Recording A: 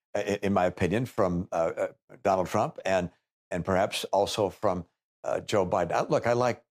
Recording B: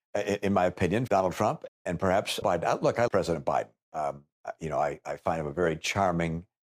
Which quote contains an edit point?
B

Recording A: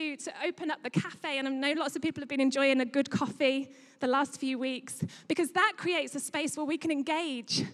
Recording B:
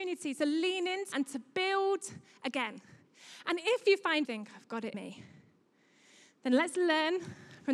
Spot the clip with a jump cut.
B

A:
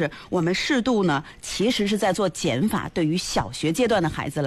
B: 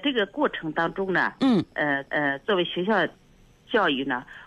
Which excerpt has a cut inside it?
B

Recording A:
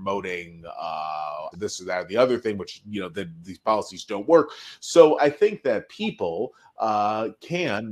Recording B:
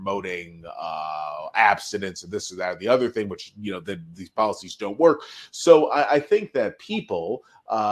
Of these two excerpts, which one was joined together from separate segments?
A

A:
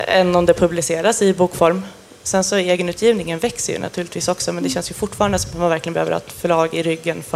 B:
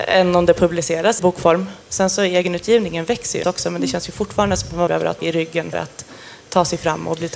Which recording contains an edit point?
B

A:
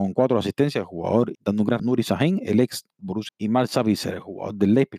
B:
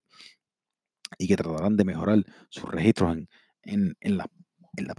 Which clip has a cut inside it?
A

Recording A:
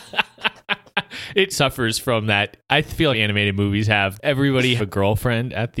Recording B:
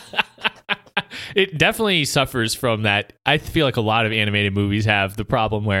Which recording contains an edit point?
A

